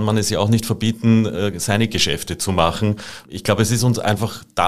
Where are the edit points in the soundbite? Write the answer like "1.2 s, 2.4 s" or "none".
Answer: none